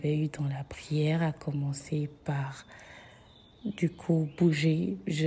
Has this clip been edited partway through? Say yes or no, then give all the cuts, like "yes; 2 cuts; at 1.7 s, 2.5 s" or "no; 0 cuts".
no; 0 cuts